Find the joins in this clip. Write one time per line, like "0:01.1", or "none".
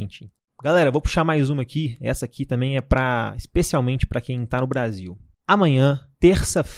none